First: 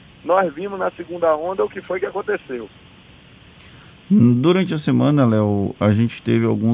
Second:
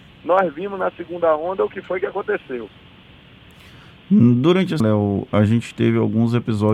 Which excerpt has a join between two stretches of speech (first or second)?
second